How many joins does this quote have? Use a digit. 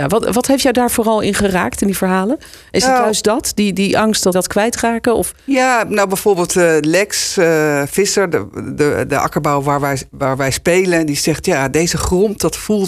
2